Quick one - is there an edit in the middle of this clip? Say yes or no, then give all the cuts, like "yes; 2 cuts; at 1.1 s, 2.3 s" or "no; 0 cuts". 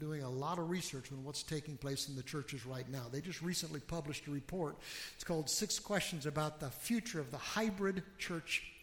no; 0 cuts